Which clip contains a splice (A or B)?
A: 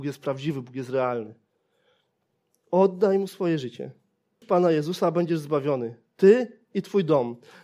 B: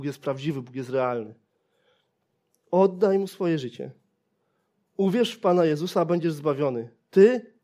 A